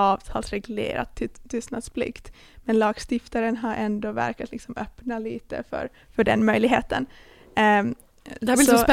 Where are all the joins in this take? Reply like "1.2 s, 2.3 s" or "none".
none